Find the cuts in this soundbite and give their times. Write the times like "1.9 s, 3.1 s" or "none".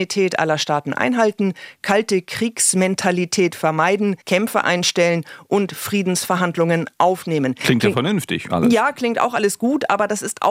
4.2 s